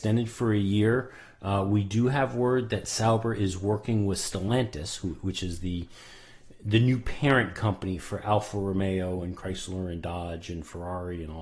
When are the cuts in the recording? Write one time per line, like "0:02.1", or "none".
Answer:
none